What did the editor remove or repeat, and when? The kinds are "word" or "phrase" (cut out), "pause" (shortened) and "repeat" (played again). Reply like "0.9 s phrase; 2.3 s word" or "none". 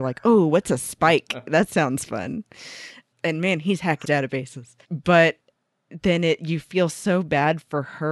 3.1 s word; 4.0 s word; 4.8 s pause

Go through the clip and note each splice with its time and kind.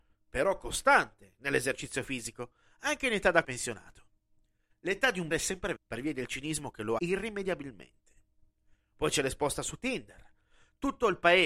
3.4 s word; 5.3 s word; 5.8 s word; 7.0 s word

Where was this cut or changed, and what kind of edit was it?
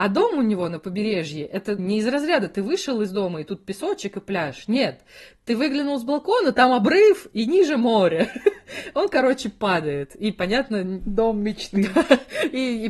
1.8 s word

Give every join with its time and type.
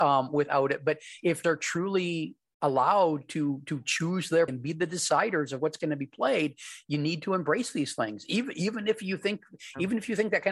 1.4 s phrase; 4.5 s word

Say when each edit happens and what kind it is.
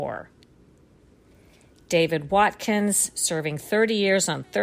none

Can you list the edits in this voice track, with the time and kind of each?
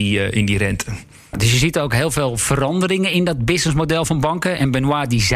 none

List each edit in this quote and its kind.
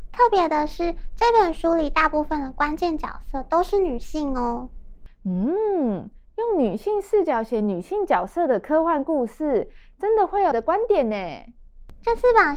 10.5 s word

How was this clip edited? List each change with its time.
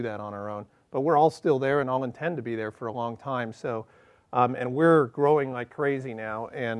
none

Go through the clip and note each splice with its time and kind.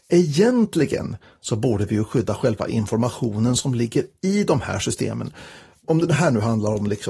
none

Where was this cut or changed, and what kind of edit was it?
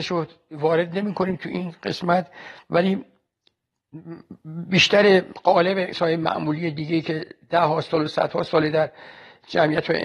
5.9 s word

